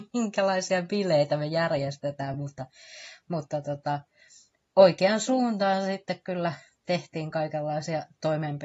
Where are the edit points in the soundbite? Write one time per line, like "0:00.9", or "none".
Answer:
none